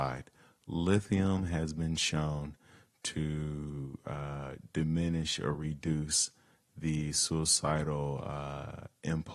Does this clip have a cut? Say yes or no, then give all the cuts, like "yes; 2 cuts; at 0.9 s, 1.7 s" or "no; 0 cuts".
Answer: no; 0 cuts